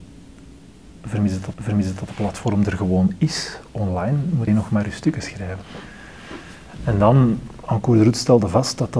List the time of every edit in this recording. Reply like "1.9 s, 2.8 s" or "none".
1.5 s, 4.5 s